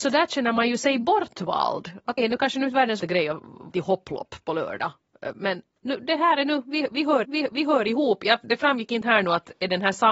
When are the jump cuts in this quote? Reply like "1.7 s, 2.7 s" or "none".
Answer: 2.2 s, 3.0 s, 3.7 s, 7.2 s, 8.4 s